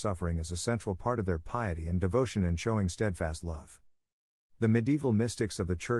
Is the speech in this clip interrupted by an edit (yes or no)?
no